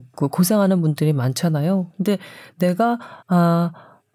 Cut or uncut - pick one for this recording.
cut